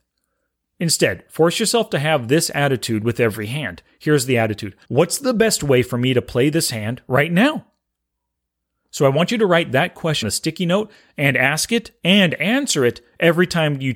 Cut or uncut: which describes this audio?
cut